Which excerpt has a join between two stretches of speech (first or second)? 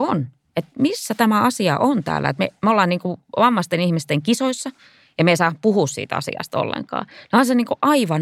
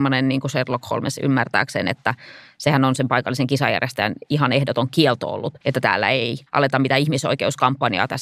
second